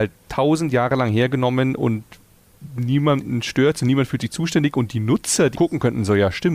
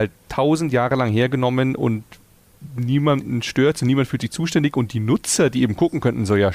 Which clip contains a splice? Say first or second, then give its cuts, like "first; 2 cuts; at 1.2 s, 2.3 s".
first; 1 cut; at 5.6 s